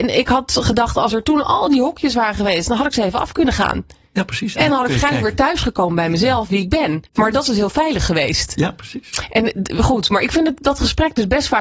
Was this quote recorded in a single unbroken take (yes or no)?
no